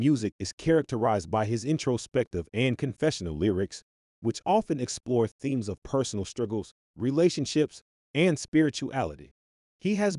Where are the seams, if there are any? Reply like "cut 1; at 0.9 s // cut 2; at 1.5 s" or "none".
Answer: none